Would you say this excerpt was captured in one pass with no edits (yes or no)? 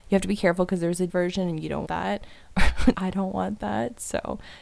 no